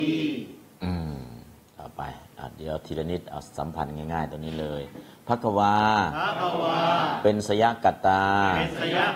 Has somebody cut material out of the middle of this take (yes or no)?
no